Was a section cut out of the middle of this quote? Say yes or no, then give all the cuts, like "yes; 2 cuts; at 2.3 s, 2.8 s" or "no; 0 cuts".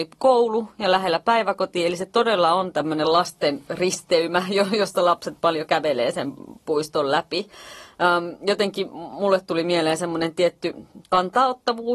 no; 0 cuts